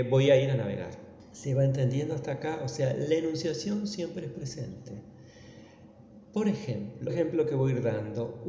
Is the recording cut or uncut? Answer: cut